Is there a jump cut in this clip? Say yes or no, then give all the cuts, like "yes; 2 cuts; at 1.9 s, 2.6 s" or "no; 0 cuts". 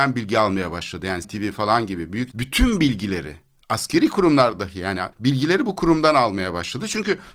yes; 3 cuts; at 1.2 s, 2.3 s, 5.1 s